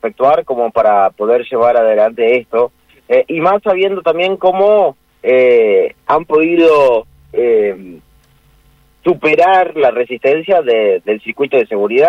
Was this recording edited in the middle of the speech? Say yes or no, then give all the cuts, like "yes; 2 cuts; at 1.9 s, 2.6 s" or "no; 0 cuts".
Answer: no; 0 cuts